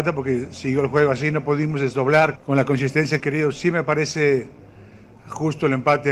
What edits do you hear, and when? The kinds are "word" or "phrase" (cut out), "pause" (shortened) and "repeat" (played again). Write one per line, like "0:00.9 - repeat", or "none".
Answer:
0:02.4 - word
0:03.2 - word